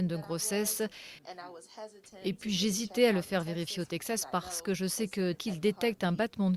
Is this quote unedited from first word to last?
no; 1 cut; at 5.3 s

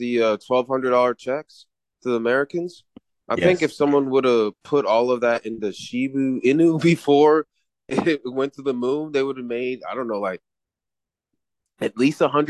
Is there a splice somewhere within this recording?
no; 0 cuts

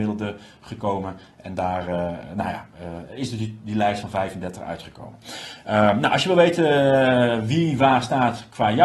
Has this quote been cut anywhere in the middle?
no; 0 cuts

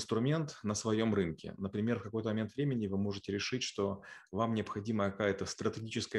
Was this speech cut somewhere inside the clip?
no; 0 cuts

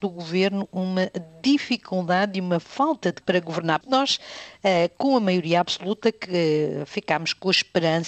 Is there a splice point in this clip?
yes; 2 cuts; at 3.2 s, 3.8 s

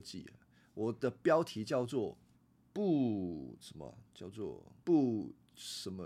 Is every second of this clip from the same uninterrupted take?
no; 2 cuts; at 2.3 s, 4.8 s

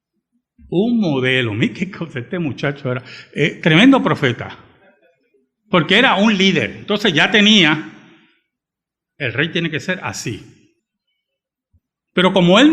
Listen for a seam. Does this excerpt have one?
no; 0 cuts

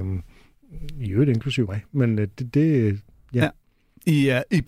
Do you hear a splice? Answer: no; 0 cuts

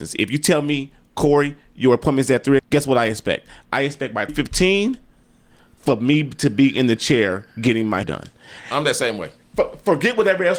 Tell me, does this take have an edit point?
yes; 4 cuts; at 2.6 s, 4.3 s, 7.5 s, 8.0 s

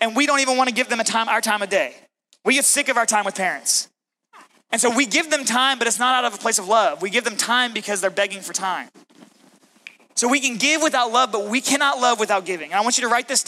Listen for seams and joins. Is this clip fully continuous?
yes; 0 cuts

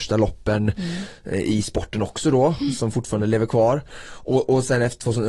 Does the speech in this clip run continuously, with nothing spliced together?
yes; 0 cuts

